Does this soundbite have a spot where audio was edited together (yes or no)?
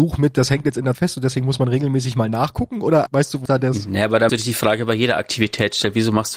yes